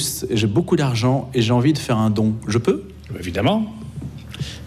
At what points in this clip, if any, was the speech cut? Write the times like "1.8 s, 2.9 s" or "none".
none